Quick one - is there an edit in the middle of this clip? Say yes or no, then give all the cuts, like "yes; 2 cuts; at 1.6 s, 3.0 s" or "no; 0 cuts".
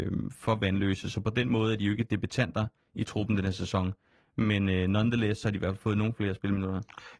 no; 0 cuts